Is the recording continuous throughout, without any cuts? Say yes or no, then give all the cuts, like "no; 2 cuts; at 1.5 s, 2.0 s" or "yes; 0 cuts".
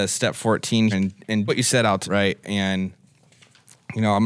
no; 3 cuts; at 0.9 s, 1.5 s, 2.0 s